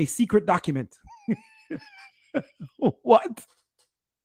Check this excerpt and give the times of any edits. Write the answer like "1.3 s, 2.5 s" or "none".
none